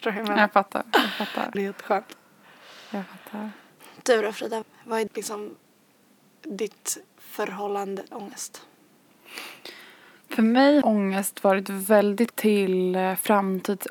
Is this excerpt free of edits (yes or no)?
no